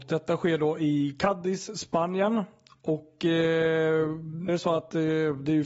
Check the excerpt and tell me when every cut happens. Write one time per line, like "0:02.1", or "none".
0:04.5